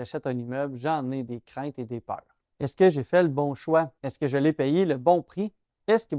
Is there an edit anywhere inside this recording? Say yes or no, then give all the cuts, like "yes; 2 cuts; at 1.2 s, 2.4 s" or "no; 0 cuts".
yes; 1 cut; at 4.0 s